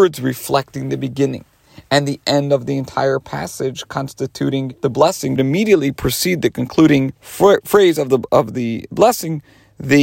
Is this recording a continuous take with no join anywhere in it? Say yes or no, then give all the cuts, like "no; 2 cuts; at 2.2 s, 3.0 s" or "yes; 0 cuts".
no; 3 cuts; at 4.8 s, 5.4 s, 7.2 s